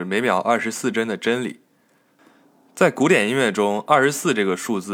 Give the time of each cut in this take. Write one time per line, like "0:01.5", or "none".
none